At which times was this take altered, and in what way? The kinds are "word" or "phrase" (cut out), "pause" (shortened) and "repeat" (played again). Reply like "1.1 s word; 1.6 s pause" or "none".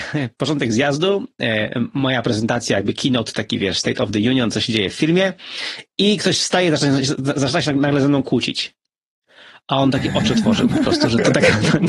none